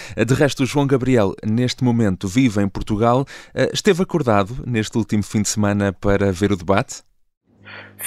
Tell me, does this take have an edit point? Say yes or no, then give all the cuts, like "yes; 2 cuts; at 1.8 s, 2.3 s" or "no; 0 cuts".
no; 0 cuts